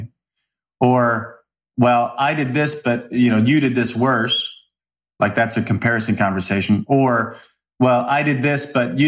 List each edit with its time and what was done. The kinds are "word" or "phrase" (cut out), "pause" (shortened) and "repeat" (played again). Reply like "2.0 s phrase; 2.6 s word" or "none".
none

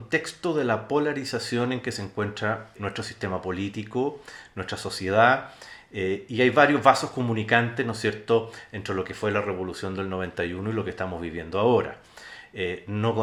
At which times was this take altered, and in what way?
2.7 s word

